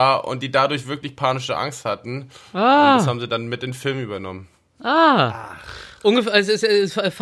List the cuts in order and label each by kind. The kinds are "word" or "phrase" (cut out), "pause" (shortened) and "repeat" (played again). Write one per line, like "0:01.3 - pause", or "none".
none